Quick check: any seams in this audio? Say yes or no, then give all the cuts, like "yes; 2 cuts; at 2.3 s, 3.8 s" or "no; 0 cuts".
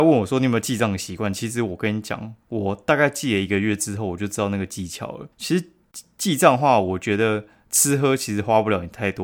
yes; 2 cuts; at 2.4 s, 5.3 s